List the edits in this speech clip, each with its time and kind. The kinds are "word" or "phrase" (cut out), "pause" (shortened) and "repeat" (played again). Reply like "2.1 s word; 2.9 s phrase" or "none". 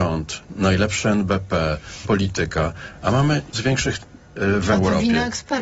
2.0 s word; 3.5 s word; 4.2 s word